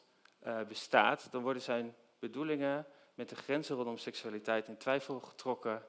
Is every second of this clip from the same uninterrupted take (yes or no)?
yes